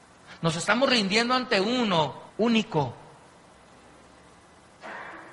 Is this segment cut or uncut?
cut